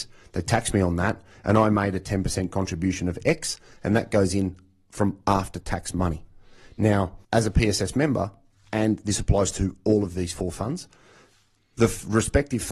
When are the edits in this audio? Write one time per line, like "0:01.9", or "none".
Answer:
0:07.2